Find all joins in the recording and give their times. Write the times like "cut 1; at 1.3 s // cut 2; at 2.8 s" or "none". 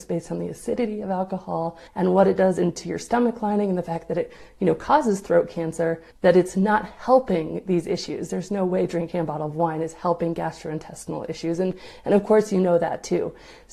cut 1; at 1.9 s // cut 2; at 6.1 s